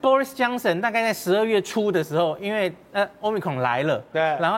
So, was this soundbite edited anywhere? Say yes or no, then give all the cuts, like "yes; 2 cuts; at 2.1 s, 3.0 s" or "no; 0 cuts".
no; 0 cuts